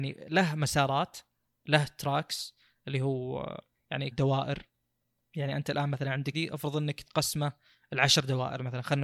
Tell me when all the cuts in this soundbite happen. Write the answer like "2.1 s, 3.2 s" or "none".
4.1 s, 6.3 s